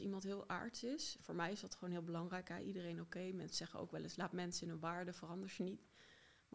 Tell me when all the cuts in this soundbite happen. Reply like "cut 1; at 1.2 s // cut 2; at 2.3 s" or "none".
none